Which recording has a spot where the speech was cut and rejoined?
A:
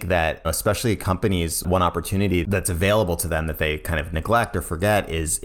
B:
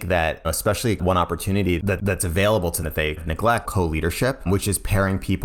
B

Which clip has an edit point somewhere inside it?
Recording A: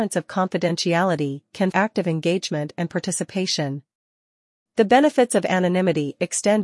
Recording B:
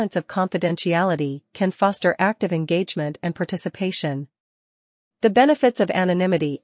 A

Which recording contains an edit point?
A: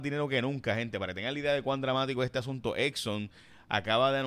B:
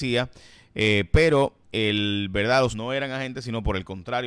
B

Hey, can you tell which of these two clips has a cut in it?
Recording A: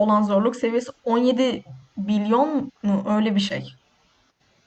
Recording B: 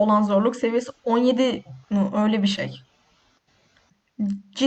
B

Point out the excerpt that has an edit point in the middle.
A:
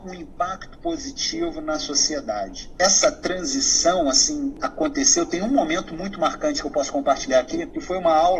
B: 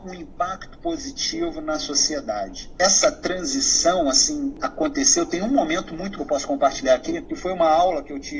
B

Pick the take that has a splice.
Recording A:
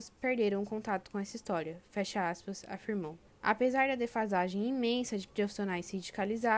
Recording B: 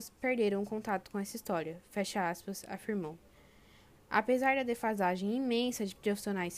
A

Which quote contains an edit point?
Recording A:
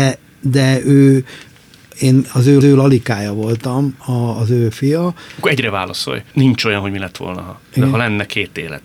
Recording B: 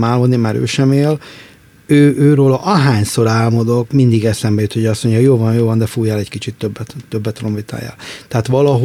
A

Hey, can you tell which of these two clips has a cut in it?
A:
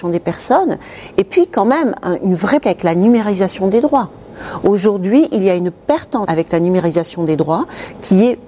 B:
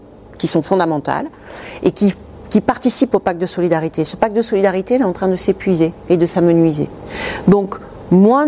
A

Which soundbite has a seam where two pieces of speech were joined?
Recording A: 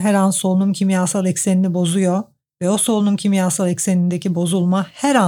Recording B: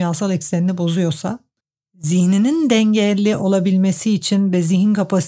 B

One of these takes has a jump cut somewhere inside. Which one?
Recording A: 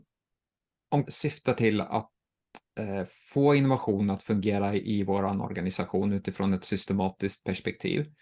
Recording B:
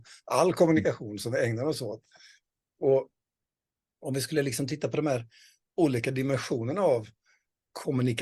A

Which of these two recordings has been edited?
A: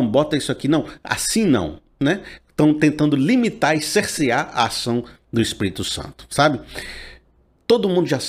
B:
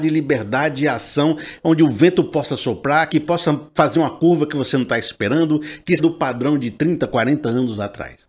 B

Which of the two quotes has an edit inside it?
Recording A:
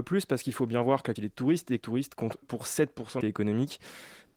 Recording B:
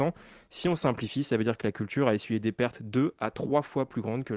A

